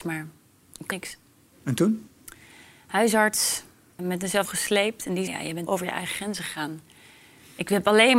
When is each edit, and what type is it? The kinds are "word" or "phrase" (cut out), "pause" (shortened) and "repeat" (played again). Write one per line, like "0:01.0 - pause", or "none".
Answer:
0:00.9 - word
0:04.0 - word
0:04.4 - word
0:05.3 - word
0:05.7 - word